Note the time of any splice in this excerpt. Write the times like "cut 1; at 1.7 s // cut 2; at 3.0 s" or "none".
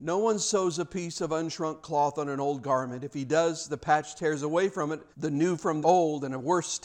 cut 1; at 5.1 s // cut 2; at 5.8 s